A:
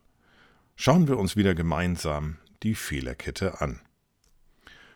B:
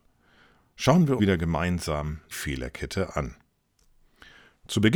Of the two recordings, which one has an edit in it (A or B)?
B